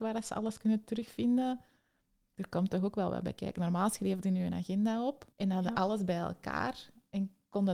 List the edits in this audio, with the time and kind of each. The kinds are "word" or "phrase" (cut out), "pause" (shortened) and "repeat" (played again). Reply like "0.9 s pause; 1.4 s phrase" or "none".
4.2 s word; 5.3 s pause